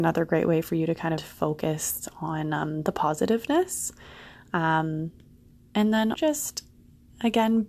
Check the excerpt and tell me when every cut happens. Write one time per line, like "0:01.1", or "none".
0:01.2
0:06.1